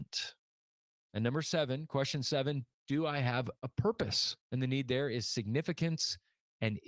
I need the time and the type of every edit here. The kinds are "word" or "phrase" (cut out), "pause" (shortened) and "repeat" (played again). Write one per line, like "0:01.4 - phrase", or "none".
0:04.4 - pause